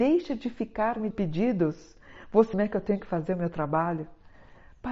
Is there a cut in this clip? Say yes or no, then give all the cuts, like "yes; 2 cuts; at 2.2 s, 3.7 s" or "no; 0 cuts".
yes; 2 cuts; at 1.1 s, 2.5 s